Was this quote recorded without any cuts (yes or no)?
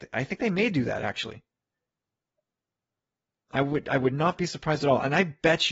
yes